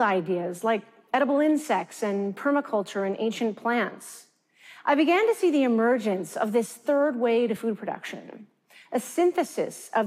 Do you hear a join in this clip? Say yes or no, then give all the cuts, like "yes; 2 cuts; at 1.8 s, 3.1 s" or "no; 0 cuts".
no; 0 cuts